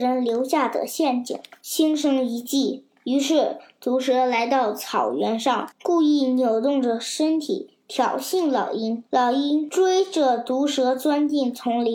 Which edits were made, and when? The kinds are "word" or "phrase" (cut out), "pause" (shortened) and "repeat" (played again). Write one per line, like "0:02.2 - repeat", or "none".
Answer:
0:05.7 - pause
0:09.1 - pause